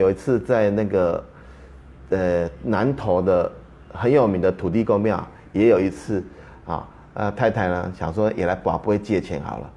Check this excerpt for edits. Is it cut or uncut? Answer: uncut